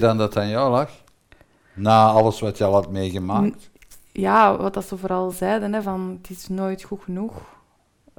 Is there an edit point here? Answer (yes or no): no